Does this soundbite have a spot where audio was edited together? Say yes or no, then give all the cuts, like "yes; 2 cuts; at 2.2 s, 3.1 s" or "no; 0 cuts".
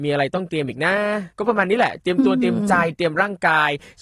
yes; 1 cut; at 1.3 s